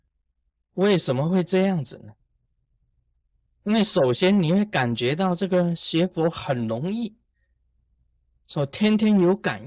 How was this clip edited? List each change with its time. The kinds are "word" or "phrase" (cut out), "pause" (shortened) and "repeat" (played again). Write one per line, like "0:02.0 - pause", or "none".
none